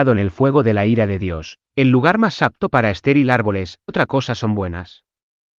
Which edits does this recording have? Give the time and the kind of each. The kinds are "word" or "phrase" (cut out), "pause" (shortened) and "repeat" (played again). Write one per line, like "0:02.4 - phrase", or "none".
0:03.9 - word